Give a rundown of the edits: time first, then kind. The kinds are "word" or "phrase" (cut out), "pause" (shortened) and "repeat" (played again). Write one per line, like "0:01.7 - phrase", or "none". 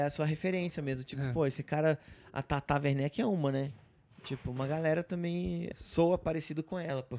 0:05.7 - word